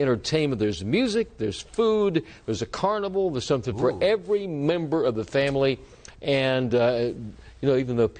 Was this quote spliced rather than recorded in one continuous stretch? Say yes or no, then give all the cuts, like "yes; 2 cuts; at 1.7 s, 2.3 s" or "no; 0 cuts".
no; 0 cuts